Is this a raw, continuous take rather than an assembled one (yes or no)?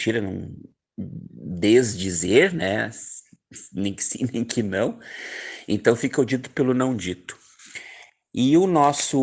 yes